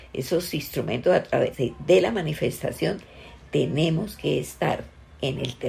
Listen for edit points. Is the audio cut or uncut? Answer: cut